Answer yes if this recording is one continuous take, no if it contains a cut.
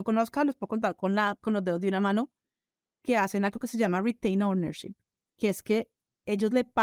yes